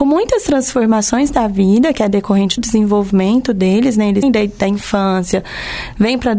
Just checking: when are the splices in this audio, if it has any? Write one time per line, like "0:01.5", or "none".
0:02.6
0:04.2